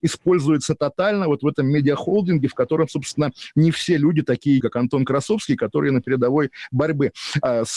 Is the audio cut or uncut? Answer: cut